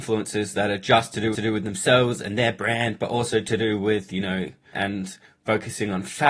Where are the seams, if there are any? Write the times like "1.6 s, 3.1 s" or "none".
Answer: 1.3 s, 4.7 s